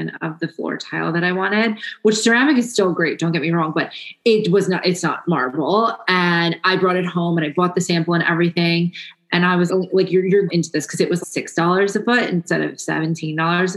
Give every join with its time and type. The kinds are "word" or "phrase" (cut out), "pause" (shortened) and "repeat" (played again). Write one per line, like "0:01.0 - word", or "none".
0:09.7 - word
0:10.5 - phrase
0:11.2 - word